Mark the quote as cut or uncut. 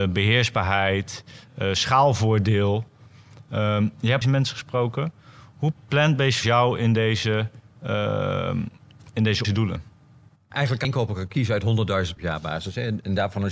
cut